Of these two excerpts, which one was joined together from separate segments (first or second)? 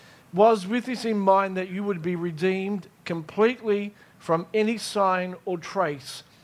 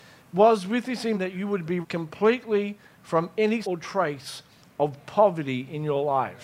second